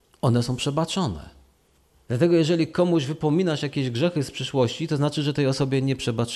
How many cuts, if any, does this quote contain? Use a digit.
0